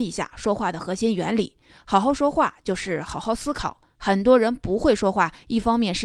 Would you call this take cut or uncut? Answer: uncut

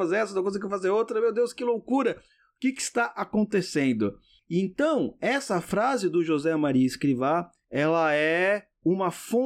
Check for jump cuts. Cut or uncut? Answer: uncut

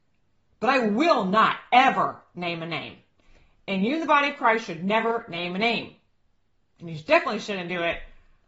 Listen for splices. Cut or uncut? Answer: uncut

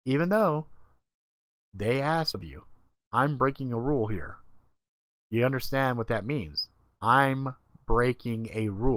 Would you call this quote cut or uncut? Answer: cut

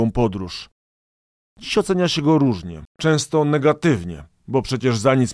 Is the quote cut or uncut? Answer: cut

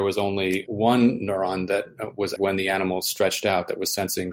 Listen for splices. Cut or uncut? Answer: cut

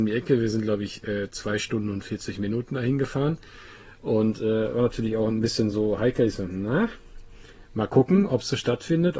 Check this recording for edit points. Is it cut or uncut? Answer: uncut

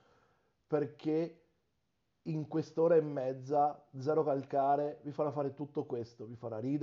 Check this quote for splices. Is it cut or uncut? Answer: uncut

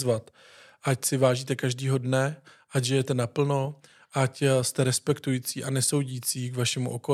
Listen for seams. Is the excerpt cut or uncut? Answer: uncut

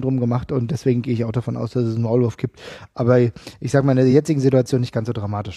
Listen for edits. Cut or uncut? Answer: uncut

